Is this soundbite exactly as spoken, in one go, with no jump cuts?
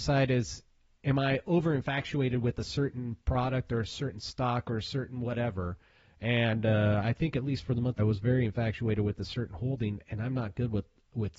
no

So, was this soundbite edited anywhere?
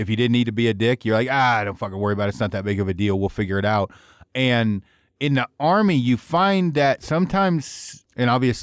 no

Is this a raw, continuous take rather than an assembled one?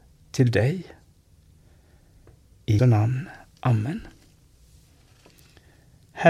no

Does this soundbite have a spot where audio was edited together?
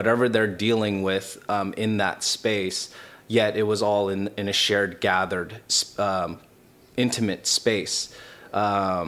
no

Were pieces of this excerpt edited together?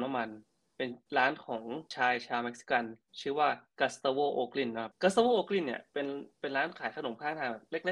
yes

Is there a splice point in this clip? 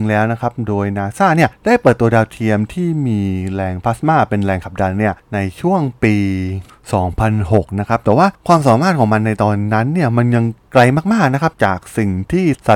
no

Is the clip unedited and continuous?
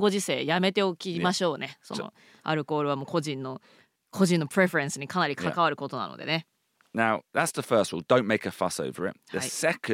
yes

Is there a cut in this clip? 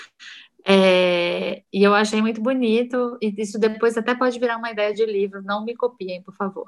no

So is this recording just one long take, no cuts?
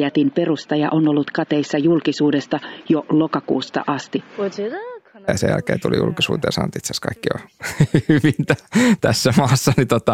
yes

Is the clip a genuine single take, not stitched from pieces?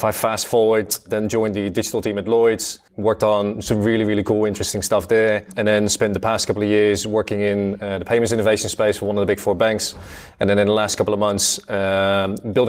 no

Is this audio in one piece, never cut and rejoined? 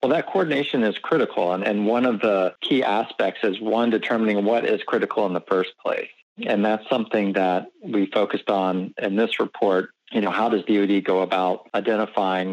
yes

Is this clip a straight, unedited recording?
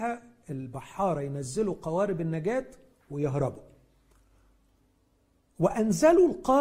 yes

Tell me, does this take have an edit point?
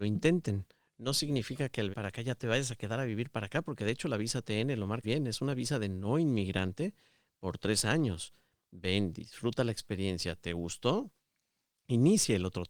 yes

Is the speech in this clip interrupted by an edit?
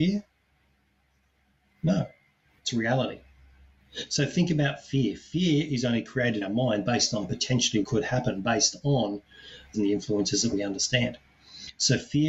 yes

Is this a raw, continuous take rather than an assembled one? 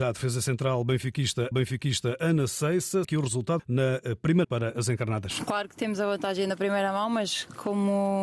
no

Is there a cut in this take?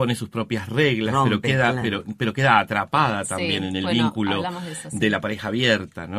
no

